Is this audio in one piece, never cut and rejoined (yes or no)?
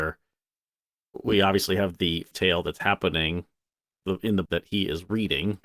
no